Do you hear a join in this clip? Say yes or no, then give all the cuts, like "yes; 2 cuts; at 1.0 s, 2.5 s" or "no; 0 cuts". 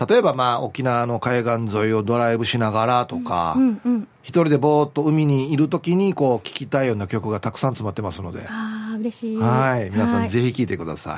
yes; 1 cut; at 4.1 s